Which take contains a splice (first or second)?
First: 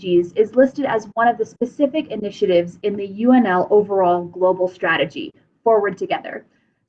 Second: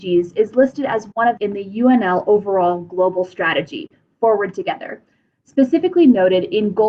second